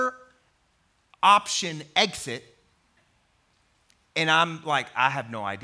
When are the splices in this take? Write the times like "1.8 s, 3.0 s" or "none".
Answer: none

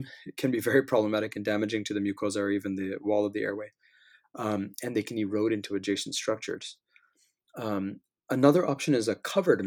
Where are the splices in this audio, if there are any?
none

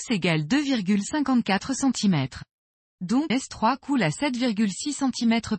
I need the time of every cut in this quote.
3.3 s

